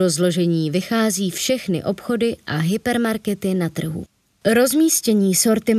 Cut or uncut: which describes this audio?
uncut